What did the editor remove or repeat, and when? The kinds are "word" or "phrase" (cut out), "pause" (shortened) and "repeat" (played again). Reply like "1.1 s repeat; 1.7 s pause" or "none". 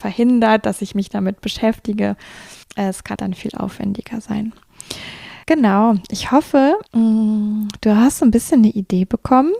2.6 s pause; 3.2 s word; 5.4 s pause; 6.9 s pause